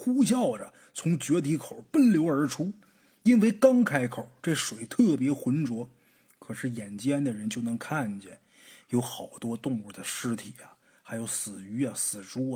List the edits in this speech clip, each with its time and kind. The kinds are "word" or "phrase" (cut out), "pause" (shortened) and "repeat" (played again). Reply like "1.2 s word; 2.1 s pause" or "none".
none

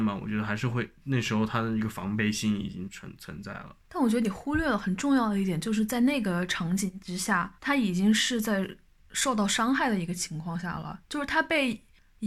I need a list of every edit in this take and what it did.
3.8 s pause; 7.6 s pause

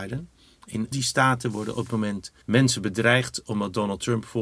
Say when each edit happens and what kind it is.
0.9 s word; 1.9 s word; 2.4 s pause

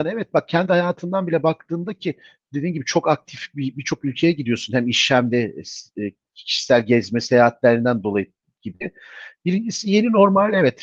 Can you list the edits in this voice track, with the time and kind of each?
none

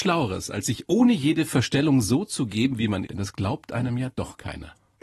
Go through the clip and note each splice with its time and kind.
3.1 s word

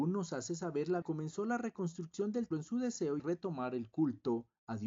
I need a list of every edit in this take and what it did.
1.0 s word; 2.5 s word; 3.2 s phrase

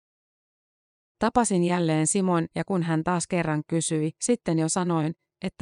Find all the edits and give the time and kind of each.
4.2 s pause

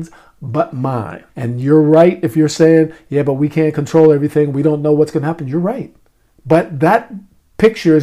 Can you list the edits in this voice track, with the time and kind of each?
1.3 s pause; 6.3 s pause

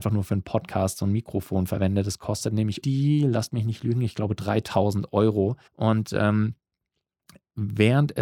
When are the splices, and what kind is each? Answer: 2.8 s word; 5.7 s pause

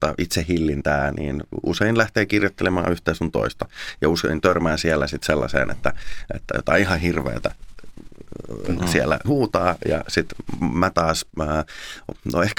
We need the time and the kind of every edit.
9.2 s word

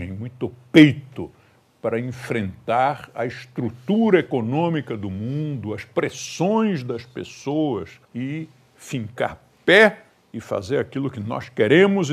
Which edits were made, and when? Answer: 8.0 s pause

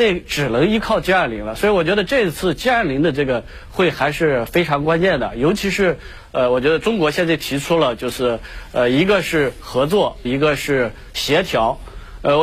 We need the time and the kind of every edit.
10.2 s word

